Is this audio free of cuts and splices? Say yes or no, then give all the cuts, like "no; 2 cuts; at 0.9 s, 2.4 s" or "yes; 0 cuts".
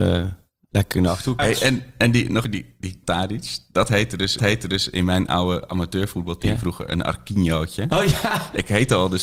no; 4 cuts; at 1.4 s, 2.4 s, 3.0 s, 4.4 s